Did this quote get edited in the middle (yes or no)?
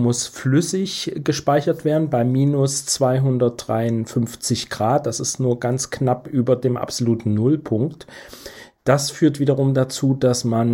no